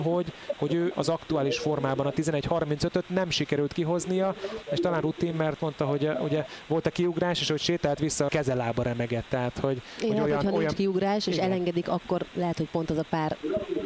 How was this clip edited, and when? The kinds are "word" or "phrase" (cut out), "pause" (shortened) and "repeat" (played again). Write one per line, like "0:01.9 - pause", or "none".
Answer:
0:00.9 - phrase
0:05.0 - phrase
0:05.6 - word
0:08.3 - word